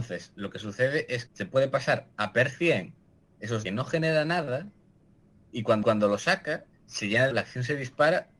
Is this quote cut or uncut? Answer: cut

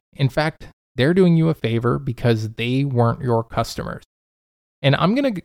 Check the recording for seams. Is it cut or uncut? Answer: uncut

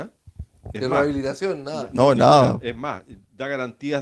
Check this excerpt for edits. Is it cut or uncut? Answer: uncut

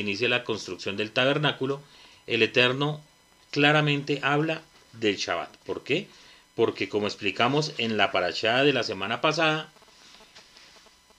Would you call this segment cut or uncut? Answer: uncut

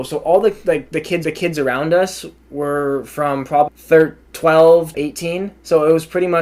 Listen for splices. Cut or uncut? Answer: cut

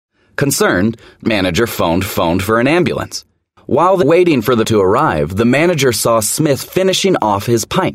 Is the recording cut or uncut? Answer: cut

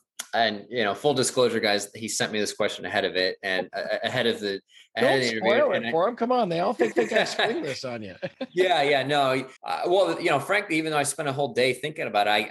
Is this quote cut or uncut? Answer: cut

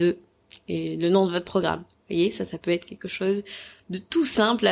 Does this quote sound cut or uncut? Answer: uncut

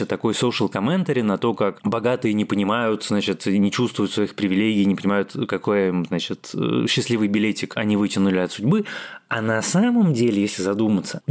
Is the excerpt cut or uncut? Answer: uncut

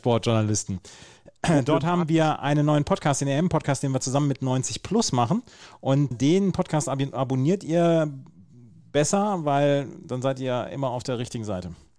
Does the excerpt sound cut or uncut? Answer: cut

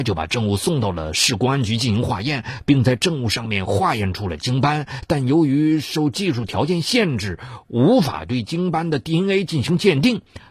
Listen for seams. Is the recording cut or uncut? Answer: uncut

